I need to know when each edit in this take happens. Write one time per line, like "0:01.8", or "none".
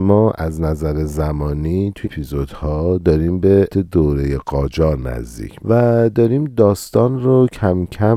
0:02.0
0:03.7
0:05.6